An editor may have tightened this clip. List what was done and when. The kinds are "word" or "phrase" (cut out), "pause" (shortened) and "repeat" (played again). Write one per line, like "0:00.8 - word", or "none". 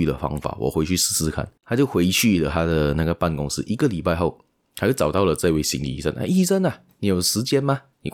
0:01.6 - pause